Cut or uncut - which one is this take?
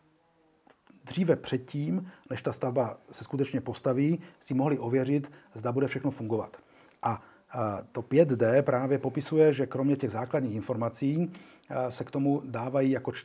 uncut